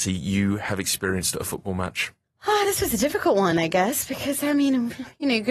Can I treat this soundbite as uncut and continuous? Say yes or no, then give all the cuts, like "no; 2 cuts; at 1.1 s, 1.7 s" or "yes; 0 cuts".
yes; 0 cuts